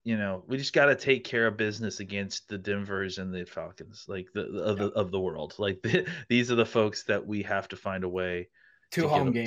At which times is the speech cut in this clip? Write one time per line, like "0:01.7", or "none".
none